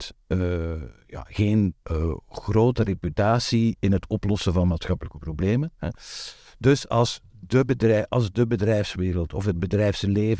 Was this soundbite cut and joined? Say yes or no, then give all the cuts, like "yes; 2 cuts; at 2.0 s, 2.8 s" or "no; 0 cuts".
no; 0 cuts